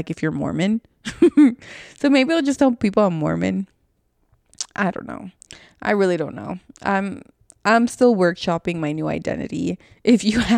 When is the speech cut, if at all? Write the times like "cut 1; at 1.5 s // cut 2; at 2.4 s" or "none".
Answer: none